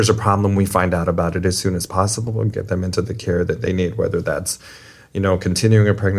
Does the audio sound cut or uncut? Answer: uncut